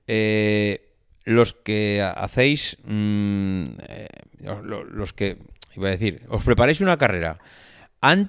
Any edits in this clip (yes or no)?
no